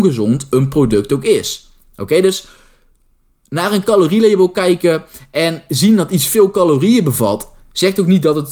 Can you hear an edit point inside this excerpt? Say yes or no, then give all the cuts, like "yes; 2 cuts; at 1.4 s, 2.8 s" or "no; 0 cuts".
no; 0 cuts